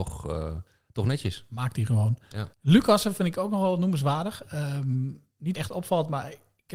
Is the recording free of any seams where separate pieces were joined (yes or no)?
no